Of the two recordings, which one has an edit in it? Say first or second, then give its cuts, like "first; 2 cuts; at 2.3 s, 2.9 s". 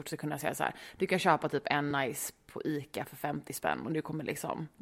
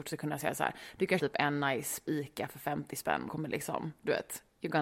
second; 3 cuts; at 1.2 s, 2.1 s, 3.3 s